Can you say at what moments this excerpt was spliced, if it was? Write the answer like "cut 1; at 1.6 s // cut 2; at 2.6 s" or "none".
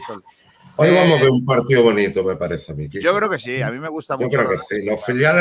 none